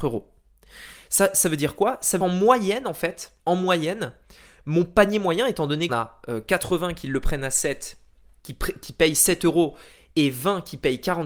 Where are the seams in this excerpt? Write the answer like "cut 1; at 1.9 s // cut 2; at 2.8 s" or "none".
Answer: cut 1; at 2.2 s // cut 2; at 3.4 s // cut 3; at 5.9 s

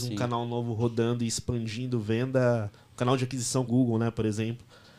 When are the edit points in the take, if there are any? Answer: cut 1; at 3.7 s

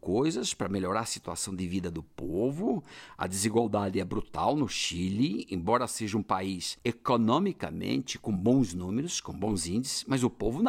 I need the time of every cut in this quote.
none

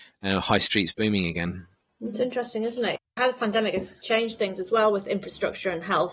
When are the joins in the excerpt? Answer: cut 1; at 1.9 s

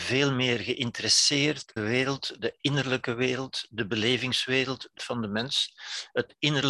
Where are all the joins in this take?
cut 1; at 1.8 s // cut 2; at 5.0 s

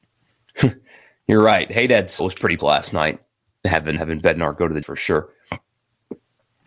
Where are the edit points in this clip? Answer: cut 1; at 2.2 s // cut 2; at 2.6 s // cut 3; at 4.0 s // cut 4; at 4.8 s

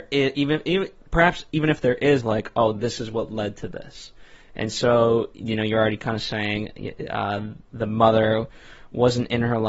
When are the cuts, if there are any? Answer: cut 1; at 2.2 s

